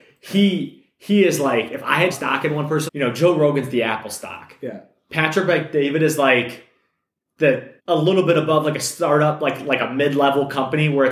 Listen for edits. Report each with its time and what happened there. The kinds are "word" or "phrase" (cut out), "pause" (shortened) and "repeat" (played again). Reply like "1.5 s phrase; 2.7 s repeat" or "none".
2.1 s phrase; 2.9 s word; 7.8 s pause